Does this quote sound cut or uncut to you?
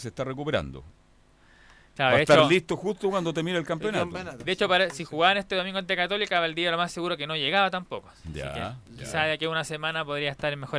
uncut